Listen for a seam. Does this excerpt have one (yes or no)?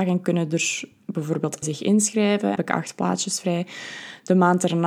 yes